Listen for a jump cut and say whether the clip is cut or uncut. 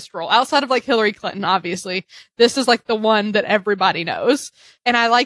uncut